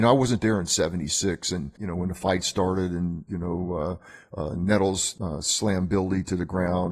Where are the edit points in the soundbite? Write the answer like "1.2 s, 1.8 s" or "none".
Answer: none